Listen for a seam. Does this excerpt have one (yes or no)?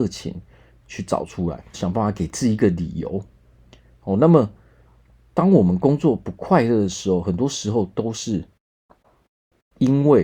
yes